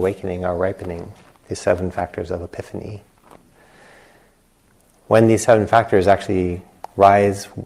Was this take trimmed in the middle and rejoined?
no; 0 cuts

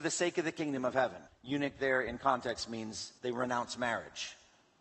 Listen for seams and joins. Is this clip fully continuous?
no; 2 cuts; at 1.3 s, 3.2 s

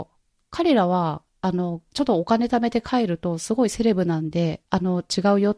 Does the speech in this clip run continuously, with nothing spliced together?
no; 2 cuts; at 1.9 s, 4.7 s

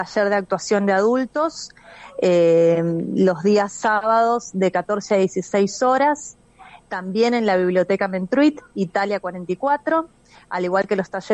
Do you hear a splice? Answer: no; 0 cuts

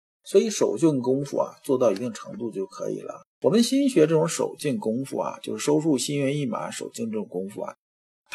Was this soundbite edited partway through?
yes; 1 cut; at 3.3 s

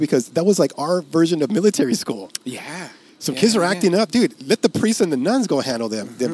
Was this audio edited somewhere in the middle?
no; 0 cuts

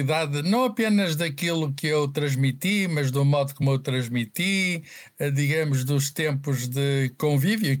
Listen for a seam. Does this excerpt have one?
no; 0 cuts

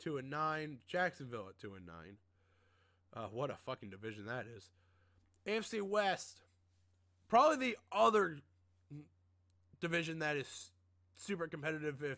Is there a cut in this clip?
no; 0 cuts

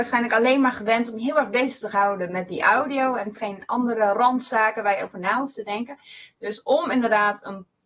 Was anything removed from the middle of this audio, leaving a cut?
yes; 1 cut; at 3.3 s

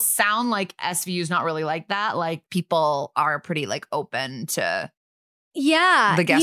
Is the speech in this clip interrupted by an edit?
no; 0 cuts

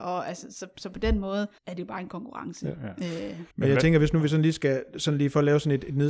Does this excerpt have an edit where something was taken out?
yes; 2 cuts; at 1.6 s, 3.5 s

